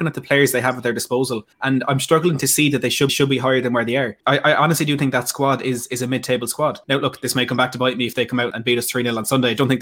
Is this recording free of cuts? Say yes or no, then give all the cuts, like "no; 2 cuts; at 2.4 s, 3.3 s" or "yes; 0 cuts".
no; 5 cuts; at 1.5 s, 3.1 s, 4.2 s, 6.8 s, 8.5 s